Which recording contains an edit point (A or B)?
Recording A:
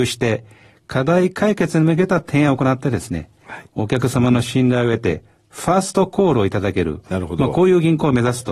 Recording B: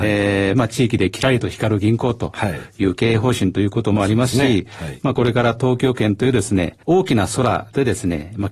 B